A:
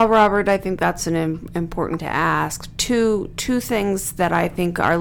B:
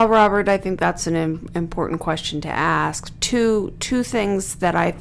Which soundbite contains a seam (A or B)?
A